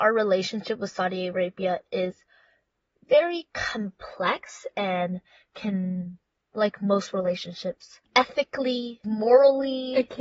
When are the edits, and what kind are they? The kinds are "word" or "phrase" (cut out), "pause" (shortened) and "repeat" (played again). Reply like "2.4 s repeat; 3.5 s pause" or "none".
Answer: none